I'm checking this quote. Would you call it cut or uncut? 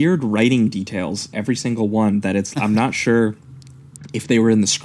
cut